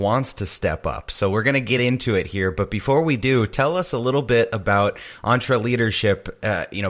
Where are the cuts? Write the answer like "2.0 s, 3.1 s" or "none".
none